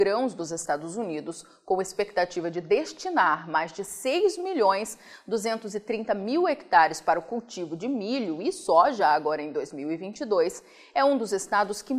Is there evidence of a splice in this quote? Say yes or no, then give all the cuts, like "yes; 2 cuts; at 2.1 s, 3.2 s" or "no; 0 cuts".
no; 0 cuts